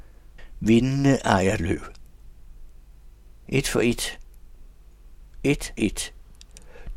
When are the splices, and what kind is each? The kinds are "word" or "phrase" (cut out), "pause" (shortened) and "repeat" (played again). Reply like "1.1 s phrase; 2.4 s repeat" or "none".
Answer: 1.6 s word; 5.8 s word